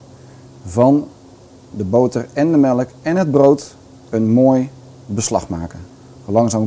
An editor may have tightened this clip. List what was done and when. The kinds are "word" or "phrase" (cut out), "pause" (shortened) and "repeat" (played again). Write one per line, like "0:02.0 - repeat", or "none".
none